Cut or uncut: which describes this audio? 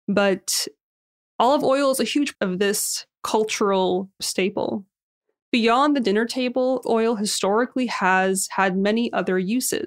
cut